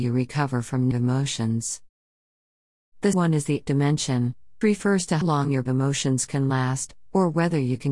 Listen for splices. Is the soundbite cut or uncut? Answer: cut